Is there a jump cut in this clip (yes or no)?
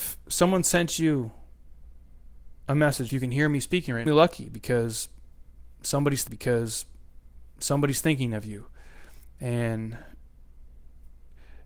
yes